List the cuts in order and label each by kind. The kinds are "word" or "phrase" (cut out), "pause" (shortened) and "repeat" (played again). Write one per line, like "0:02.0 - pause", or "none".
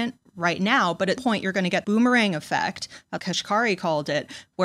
0:01.2 - word
0:01.8 - word
0:03.2 - word